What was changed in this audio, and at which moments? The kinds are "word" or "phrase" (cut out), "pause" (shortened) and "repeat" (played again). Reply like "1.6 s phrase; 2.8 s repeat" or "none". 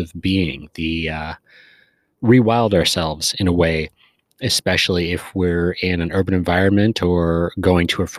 none